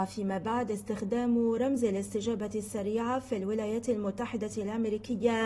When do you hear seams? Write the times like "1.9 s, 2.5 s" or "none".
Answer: none